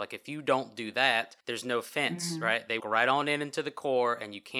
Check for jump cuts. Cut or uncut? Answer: cut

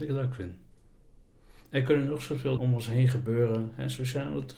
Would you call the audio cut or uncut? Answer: cut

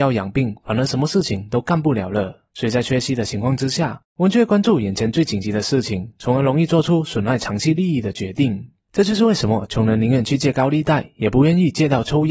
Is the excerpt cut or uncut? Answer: cut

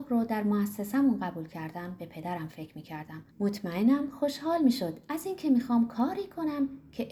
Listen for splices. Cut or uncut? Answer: cut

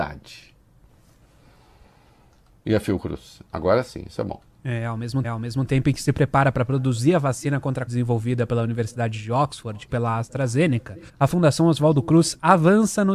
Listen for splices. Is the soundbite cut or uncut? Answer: cut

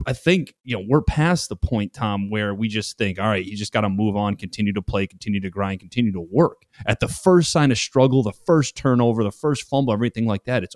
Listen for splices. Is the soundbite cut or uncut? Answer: cut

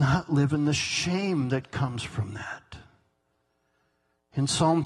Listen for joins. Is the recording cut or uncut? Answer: uncut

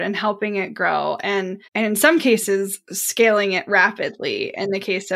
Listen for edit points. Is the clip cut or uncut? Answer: cut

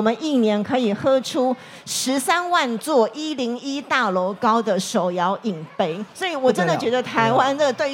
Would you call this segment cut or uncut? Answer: cut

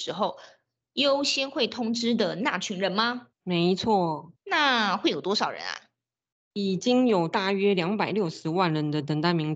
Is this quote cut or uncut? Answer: cut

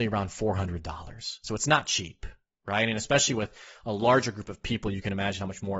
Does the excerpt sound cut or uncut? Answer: uncut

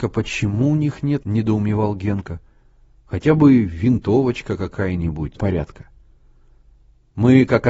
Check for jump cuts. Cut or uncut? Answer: cut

